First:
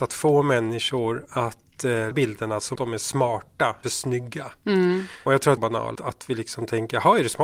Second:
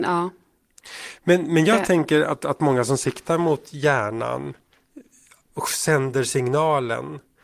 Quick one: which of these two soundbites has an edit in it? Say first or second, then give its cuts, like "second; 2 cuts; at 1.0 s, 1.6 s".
first; 6 cuts; at 2.1 s, 2.8 s, 3.8 s, 5.3 s, 5.6 s, 6.0 s